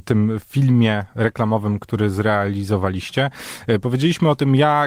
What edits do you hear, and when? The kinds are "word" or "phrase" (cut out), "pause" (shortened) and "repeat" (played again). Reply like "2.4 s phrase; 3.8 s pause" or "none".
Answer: none